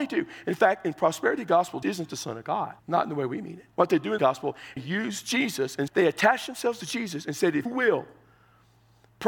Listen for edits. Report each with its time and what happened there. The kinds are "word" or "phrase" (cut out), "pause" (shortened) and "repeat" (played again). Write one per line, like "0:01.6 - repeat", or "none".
0:01.8 - word
0:02.8 - pause
0:03.7 - pause
0:04.2 - phrase
0:04.8 - phrase
0:05.9 - word
0:07.7 - word